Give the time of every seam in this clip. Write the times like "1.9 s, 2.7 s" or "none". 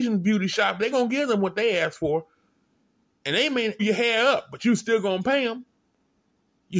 0.9 s, 3.8 s